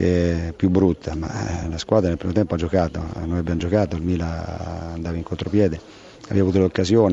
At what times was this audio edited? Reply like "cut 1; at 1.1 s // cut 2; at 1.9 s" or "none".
none